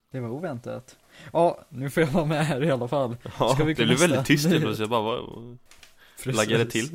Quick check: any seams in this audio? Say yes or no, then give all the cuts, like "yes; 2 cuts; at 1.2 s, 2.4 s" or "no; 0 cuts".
yes; 1 cut; at 3.7 s